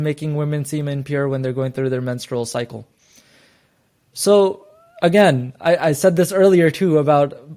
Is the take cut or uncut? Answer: uncut